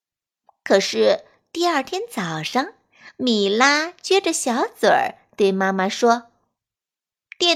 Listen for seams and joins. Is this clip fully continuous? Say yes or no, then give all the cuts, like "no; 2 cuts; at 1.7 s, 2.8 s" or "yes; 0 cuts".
yes; 0 cuts